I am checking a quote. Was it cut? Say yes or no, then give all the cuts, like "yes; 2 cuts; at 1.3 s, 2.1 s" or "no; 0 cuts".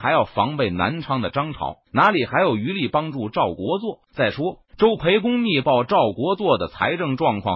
yes; 3 cuts; at 1.8 s, 4.1 s, 4.7 s